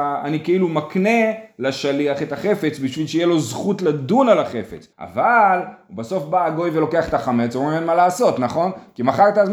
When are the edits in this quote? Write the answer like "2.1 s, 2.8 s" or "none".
4.9 s